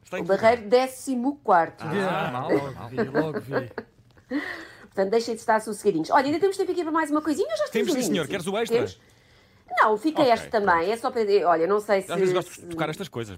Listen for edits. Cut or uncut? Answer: cut